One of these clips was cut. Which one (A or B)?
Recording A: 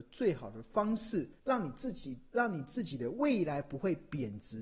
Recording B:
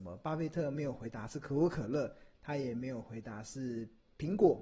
A